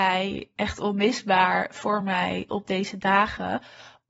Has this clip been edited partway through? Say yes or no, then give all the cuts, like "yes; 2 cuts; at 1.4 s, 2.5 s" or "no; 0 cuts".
no; 0 cuts